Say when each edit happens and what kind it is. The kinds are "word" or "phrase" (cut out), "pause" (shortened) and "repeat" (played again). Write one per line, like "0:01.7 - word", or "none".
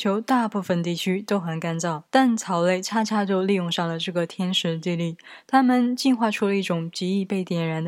0:02.1 - pause